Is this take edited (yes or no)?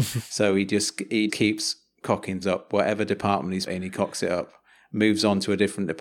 yes